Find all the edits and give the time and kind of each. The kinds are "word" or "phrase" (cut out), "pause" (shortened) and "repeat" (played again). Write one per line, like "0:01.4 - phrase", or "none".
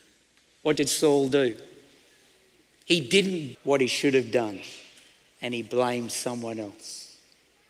0:03.5 - word